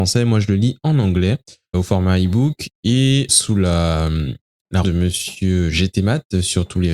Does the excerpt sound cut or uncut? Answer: cut